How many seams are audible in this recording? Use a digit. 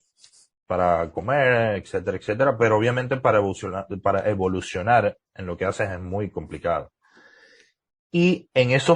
0